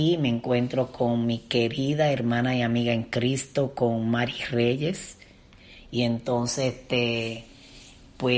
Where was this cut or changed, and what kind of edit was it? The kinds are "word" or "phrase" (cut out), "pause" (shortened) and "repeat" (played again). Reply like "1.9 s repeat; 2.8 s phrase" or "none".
none